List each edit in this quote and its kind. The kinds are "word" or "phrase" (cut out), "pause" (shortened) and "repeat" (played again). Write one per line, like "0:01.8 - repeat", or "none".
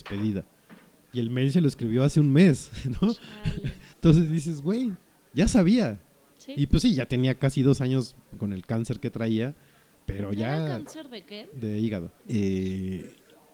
0:03.9 - pause
0:05.1 - pause
0:09.9 - pause
0:12.2 - pause